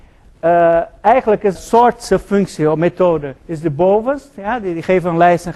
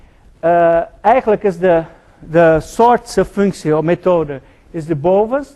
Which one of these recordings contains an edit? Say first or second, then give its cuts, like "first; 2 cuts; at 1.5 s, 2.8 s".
first; 2 cuts; at 1.6 s, 3.4 s